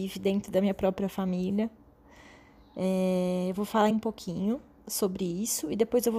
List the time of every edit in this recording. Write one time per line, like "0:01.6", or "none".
0:03.9